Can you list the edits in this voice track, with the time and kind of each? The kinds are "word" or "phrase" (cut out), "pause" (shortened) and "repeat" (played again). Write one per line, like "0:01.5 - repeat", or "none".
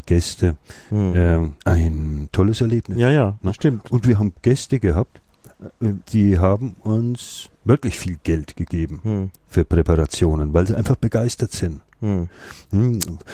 0:01.6 - pause
0:06.0 - pause
0:07.5 - pause
0:09.4 - pause